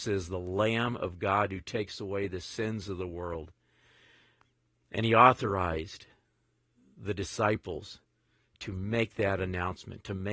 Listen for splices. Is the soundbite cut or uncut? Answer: uncut